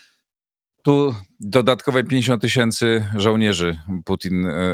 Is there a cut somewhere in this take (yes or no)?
no